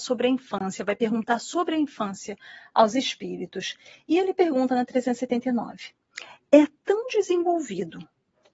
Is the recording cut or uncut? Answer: uncut